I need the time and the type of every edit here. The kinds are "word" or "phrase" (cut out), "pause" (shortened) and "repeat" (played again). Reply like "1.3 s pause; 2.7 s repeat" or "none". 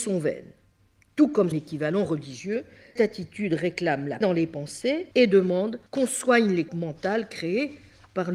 1.5 s word; 3.0 s word; 4.2 s word; 5.1 s pause; 5.9 s pause; 6.7 s word

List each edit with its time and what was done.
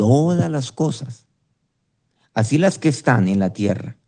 none

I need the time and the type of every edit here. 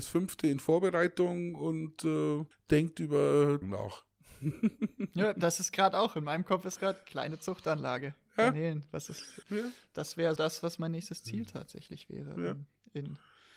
2.5 s pause; 3.6 s word; 6.8 s word; 9.4 s word; 10.4 s word

